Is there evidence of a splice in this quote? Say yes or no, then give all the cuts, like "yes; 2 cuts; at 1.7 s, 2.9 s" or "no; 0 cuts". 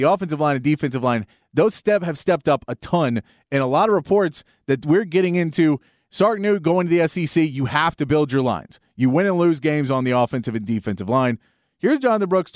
no; 0 cuts